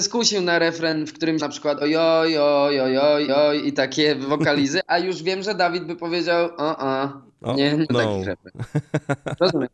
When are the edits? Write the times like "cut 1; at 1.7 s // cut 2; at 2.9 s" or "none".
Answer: cut 1; at 1.4 s // cut 2; at 1.8 s // cut 3; at 3.3 s // cut 4; at 7.9 s